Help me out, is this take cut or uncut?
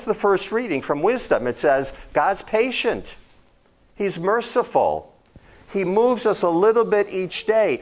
uncut